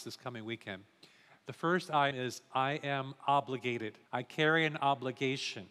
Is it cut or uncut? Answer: cut